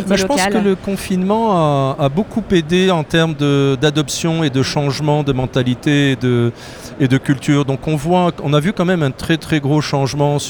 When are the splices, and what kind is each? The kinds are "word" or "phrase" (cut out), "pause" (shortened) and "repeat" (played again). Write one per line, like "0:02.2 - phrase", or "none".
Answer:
none